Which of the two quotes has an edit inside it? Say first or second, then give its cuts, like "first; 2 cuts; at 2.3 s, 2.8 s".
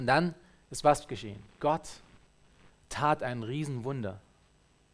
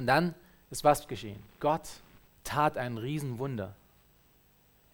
second; 1 cut; at 2.3 s